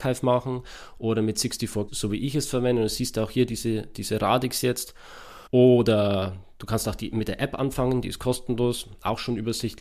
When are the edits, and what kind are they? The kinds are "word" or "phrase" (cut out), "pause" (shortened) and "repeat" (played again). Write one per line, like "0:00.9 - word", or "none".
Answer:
0:01.9 - word
0:05.5 - pause